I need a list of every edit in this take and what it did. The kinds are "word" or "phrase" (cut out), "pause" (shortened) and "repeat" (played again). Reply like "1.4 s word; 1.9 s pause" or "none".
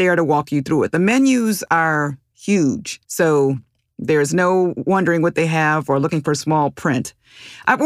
3.0 s pause